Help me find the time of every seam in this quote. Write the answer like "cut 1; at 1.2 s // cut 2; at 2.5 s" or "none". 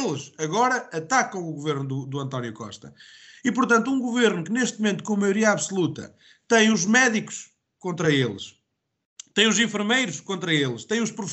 none